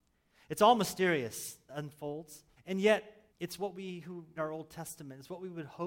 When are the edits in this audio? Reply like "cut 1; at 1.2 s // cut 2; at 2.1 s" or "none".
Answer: cut 1; at 1.7 s // cut 2; at 2.6 s // cut 3; at 3.3 s // cut 4; at 4.4 s